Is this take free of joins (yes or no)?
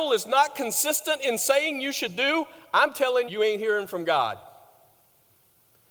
no